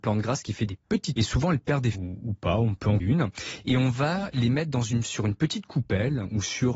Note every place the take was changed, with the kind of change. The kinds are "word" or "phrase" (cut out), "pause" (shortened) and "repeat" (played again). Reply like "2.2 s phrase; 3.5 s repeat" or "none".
1.2 s word; 1.9 s word; 3.0 s word